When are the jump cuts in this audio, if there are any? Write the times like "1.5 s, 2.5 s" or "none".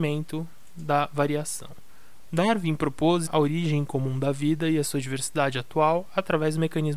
3.3 s